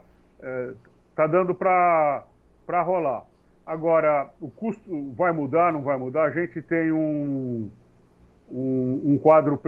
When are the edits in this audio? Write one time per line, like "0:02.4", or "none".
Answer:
none